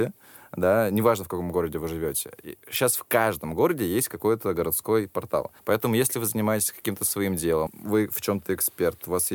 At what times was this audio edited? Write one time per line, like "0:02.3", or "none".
0:05.6
0:07.7